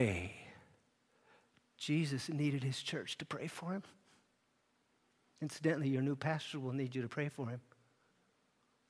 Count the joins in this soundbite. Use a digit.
0